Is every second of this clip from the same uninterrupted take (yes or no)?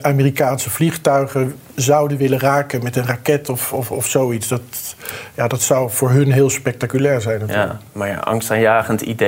yes